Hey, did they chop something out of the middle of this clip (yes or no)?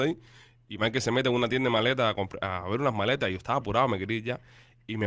no